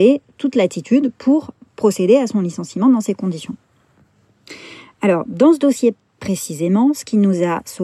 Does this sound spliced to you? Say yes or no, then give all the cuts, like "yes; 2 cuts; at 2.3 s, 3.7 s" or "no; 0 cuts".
no; 0 cuts